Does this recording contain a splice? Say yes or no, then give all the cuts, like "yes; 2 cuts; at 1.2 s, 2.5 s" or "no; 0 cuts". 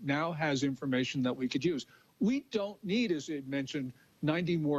no; 0 cuts